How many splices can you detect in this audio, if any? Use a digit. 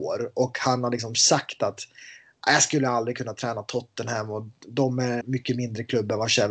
1